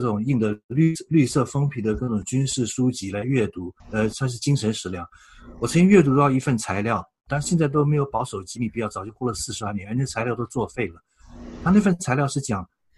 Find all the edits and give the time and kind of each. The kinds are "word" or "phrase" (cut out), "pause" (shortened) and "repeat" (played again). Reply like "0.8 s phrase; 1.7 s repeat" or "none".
3.8 s pause